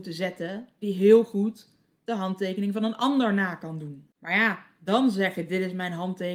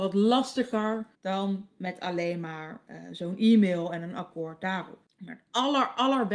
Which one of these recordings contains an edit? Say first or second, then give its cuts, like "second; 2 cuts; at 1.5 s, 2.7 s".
second; 1 cut; at 1.1 s